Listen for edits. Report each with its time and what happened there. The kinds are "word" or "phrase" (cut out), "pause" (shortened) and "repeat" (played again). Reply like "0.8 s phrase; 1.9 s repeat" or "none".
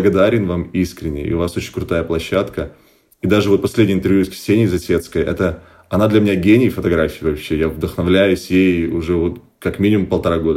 none